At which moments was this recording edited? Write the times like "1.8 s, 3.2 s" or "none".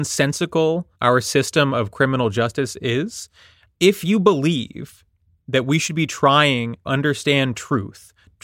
0.9 s, 6.9 s